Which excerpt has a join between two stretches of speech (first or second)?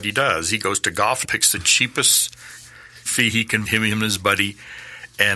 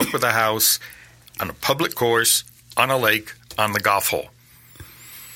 first